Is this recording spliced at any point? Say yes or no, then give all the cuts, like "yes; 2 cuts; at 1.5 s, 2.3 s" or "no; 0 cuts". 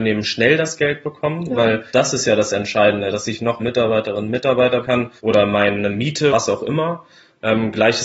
yes; 5 cuts; at 1.9 s, 3.6 s, 4.8 s, 5.2 s, 6.3 s